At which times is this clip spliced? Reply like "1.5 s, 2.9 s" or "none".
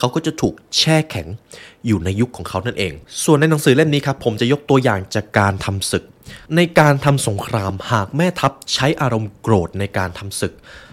6.5 s